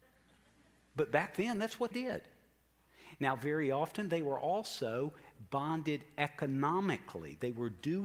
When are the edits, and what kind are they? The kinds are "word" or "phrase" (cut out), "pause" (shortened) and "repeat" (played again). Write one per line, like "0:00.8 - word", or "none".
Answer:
0:01.9 - word